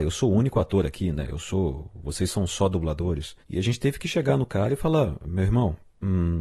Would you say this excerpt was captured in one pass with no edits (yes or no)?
no